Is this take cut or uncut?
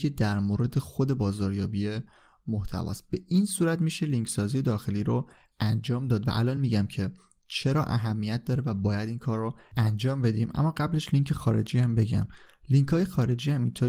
uncut